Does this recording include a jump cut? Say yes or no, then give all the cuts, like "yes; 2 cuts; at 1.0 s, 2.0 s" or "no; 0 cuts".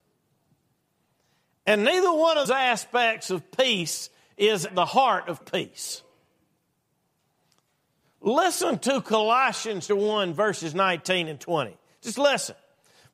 yes; 4 cuts; at 2.4 s, 4.7 s, 5.4 s, 9.9 s